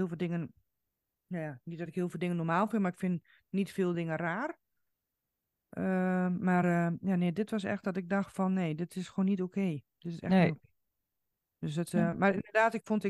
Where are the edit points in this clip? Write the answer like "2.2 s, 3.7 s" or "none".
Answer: none